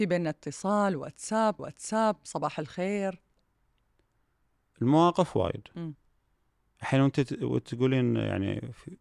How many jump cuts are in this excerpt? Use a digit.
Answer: 1